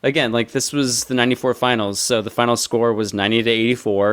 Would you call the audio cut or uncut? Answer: uncut